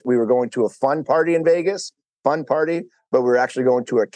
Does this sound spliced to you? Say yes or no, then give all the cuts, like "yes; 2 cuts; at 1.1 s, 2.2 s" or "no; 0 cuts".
no; 0 cuts